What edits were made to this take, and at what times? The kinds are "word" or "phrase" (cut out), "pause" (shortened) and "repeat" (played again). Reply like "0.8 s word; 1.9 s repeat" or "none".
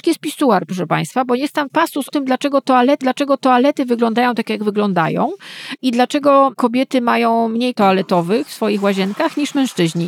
1.7 s word; 2.1 s word; 3.0 s repeat; 7.7 s word